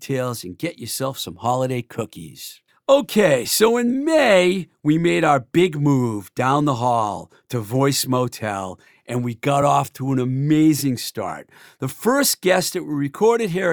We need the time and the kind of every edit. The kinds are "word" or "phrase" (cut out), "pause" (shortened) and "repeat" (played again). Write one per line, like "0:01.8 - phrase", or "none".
none